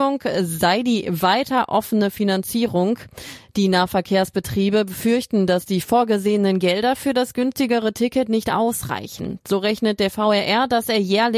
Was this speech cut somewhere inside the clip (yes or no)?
no